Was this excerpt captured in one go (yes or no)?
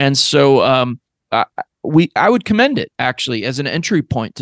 no